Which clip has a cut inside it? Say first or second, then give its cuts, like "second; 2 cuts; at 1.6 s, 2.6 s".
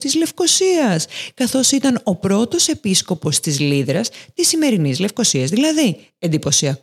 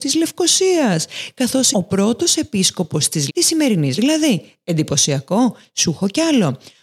second; 3 cuts; at 1.7 s, 3.3 s, 4.0 s